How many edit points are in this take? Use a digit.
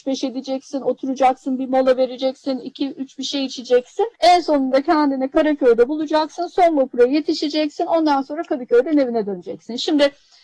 1